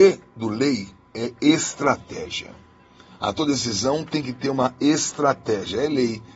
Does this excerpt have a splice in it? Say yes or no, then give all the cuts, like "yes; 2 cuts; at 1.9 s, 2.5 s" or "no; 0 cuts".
no; 0 cuts